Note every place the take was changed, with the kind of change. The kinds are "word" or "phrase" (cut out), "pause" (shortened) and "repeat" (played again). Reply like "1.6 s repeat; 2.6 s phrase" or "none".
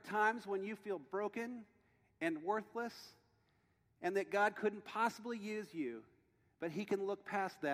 none